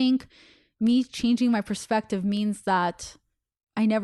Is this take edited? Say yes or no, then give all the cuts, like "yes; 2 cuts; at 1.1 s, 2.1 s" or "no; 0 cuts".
no; 0 cuts